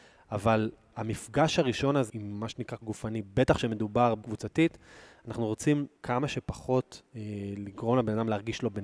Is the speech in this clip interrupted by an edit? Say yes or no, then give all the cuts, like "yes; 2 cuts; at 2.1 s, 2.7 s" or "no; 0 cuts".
yes; 6 cuts; at 0.9 s, 2.1 s, 2.8 s, 4.2 s, 6.0 s, 7.1 s